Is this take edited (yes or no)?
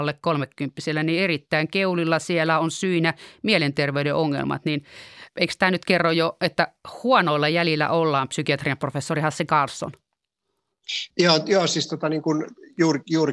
yes